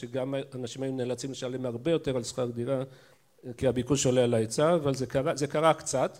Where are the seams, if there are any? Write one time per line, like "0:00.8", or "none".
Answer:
0:03.6